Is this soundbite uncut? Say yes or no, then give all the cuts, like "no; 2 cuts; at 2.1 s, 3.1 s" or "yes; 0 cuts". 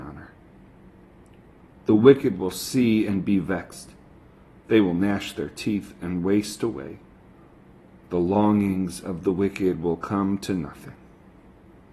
yes; 0 cuts